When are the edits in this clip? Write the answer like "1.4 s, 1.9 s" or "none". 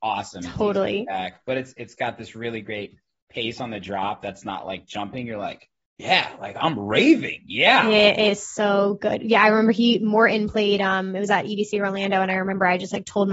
none